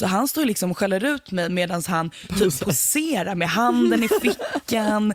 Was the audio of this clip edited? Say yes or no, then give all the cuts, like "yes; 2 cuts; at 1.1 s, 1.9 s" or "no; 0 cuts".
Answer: no; 0 cuts